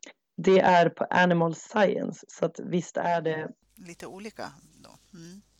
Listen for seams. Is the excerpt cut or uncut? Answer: uncut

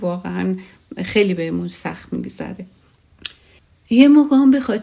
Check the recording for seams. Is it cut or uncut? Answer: uncut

